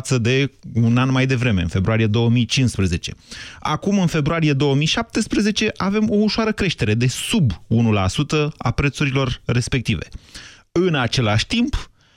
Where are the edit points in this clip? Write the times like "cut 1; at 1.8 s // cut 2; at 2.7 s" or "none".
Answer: none